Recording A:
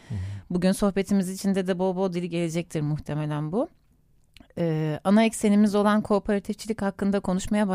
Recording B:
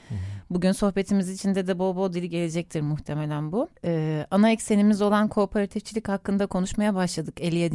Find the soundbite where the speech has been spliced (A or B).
B